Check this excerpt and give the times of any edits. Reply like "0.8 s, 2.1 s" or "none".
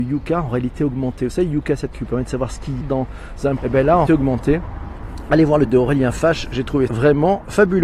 1.9 s, 2.8 s, 3.6 s, 4.1 s, 5.7 s, 6.9 s